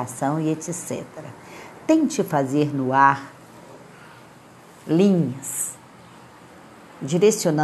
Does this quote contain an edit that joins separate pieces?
no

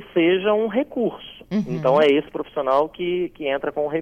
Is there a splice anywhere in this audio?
no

